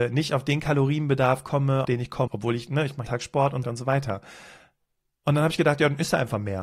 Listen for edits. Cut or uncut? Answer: cut